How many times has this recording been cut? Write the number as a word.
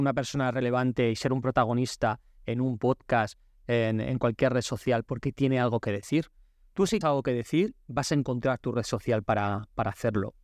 one